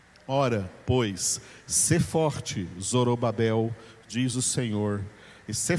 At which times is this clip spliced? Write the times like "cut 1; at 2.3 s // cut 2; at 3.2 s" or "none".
none